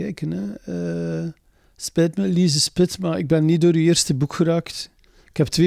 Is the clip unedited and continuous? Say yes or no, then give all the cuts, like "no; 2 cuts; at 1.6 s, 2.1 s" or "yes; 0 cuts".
yes; 0 cuts